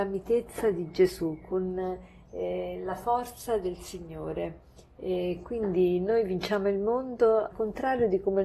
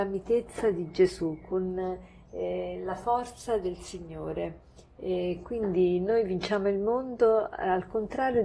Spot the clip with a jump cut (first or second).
first